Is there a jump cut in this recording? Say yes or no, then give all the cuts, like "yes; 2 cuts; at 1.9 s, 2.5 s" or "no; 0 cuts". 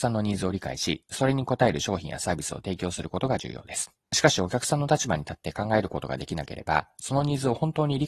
yes; 1 cut; at 4.0 s